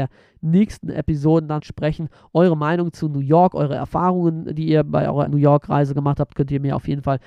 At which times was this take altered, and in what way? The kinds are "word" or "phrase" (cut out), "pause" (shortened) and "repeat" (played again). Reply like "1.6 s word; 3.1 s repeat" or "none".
1.6 s word; 5.3 s word